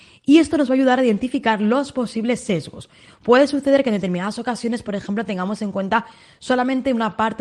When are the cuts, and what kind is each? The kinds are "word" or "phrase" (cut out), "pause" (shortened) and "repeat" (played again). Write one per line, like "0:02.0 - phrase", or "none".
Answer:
none

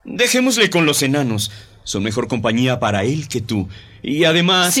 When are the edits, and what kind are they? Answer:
none

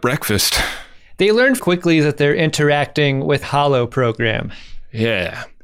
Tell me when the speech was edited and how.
0:01.6 - word
0:03.4 - word

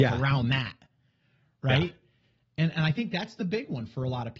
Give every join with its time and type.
none

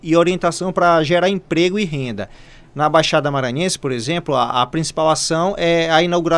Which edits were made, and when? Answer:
none

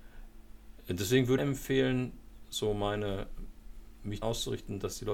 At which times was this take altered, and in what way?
0:01.4 - phrase
0:04.2 - word

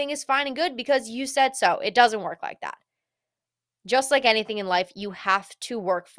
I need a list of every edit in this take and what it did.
none

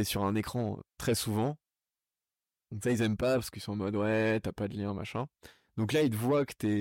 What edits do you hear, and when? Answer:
0:00.9 - pause

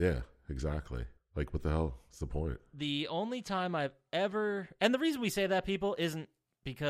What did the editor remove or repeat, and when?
0:01.2 - pause

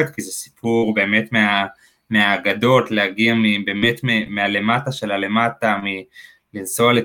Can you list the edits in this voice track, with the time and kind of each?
none

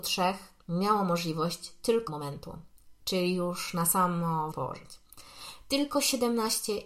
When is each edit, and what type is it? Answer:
0:02.1 - phrase
0:04.5 - phrase

